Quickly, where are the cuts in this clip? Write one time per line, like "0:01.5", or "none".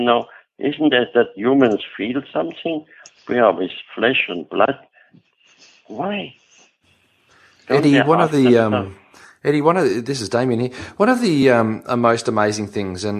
none